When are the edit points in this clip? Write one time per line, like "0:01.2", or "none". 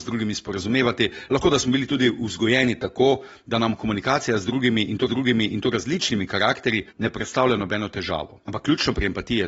0:05.1
0:06.9
0:08.4